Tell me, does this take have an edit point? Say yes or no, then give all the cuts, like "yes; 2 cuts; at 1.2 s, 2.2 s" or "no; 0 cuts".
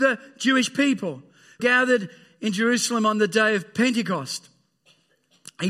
yes; 1 cut; at 1.6 s